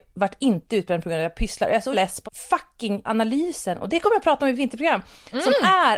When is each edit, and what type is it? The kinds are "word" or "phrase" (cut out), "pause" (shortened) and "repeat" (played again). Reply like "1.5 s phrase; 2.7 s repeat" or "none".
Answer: 1.9 s word; 2.2 s word; 3.0 s word